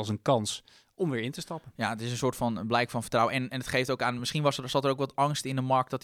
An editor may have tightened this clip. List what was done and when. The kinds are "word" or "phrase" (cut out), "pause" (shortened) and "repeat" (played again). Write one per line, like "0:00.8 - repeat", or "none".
none